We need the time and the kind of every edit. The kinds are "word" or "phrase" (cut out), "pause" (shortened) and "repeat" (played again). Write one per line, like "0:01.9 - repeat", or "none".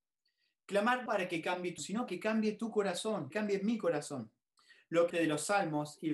0:01.1 - word
0:01.8 - word
0:02.1 - word
0:03.3 - phrase
0:04.6 - pause
0:05.1 - phrase